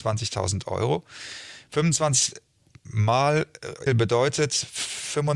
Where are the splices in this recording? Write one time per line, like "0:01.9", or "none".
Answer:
0:03.9